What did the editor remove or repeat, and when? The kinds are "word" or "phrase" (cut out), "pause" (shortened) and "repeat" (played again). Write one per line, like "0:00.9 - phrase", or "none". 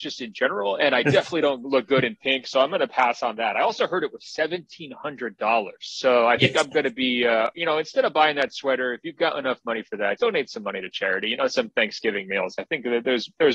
0:10.2 - word
0:11.5 - phrase